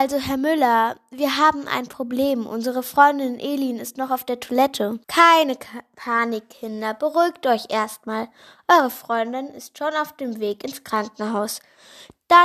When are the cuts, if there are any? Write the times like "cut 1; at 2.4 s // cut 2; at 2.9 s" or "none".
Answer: cut 1; at 5.0 s